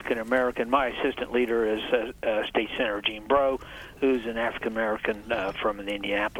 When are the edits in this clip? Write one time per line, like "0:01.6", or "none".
none